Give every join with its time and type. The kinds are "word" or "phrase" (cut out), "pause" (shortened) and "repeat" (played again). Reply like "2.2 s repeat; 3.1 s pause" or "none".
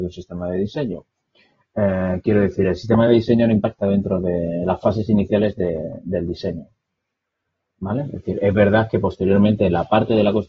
none

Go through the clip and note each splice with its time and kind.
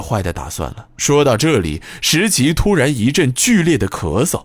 0.9 s pause

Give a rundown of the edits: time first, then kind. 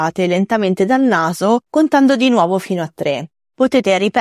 1.7 s pause

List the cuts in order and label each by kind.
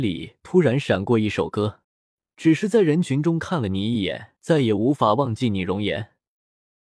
1.8 s pause; 4.4 s pause

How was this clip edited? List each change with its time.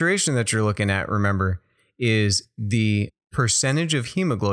none

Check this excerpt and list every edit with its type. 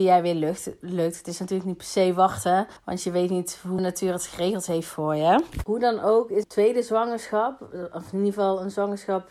2.8 s pause; 3.8 s word; 6.4 s word

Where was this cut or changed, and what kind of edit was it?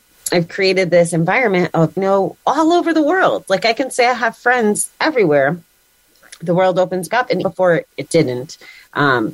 2.0 s phrase; 7.1 s word; 7.4 s word

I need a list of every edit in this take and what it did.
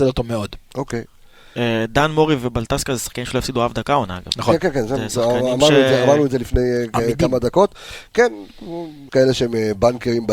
9.1 s word

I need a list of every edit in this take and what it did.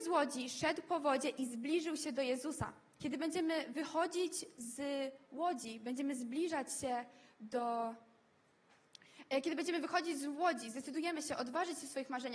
none

